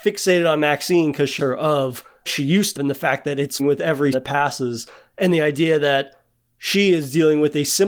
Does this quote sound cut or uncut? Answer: cut